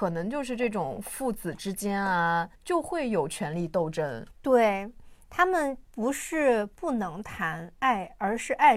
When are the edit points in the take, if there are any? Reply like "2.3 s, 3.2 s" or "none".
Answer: 2.5 s, 4.3 s